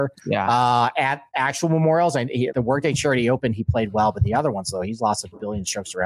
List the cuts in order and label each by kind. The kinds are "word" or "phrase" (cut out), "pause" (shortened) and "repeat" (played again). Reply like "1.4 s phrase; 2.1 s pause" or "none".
2.5 s word